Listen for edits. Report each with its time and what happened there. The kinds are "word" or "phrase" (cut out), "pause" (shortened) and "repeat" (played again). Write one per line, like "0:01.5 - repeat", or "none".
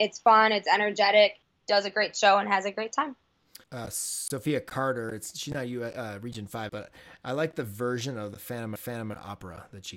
0:03.6 - pause
0:06.7 - word
0:08.8 - repeat